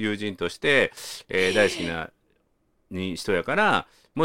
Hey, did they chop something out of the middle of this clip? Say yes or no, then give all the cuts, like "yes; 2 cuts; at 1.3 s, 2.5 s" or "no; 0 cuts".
no; 0 cuts